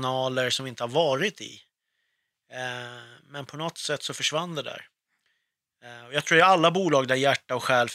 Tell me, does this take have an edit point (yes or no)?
no